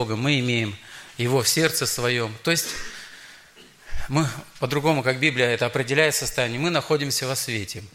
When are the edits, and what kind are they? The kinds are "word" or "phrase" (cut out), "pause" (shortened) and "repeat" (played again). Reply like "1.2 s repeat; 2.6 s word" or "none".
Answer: none